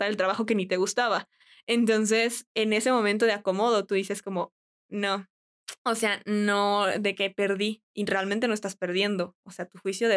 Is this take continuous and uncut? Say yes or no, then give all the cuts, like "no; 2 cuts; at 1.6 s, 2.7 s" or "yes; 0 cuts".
yes; 0 cuts